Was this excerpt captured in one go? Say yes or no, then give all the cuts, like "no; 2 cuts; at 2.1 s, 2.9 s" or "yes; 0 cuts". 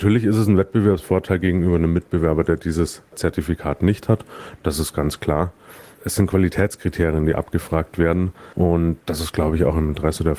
yes; 0 cuts